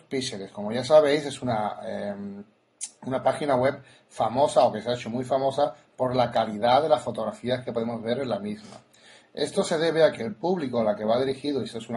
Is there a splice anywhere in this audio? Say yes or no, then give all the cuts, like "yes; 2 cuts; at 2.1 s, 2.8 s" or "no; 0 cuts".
no; 0 cuts